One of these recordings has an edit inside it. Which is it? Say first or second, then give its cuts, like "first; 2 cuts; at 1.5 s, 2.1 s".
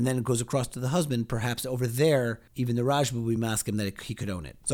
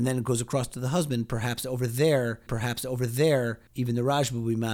second; 1 cut; at 2.5 s